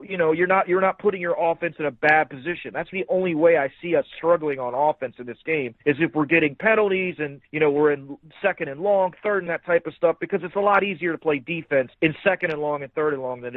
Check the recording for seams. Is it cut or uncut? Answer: cut